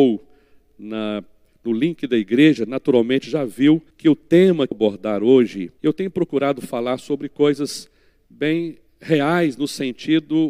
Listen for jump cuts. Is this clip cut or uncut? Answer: cut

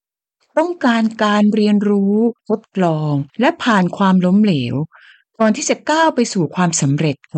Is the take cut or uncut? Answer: cut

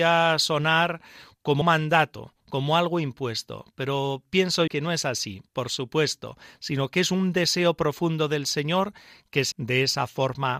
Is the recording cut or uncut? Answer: cut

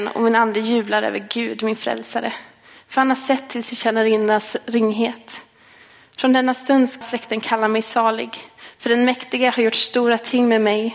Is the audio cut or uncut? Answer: cut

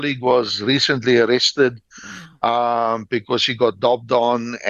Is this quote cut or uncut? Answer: uncut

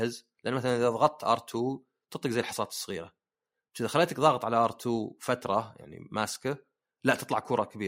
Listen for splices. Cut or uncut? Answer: uncut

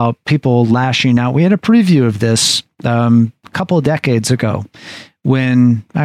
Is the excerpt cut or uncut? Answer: uncut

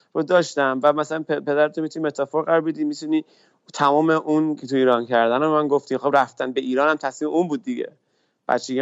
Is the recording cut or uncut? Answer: cut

